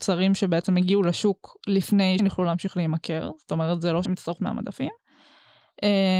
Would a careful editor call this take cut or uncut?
cut